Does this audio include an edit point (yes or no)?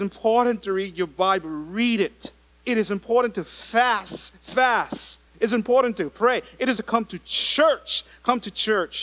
yes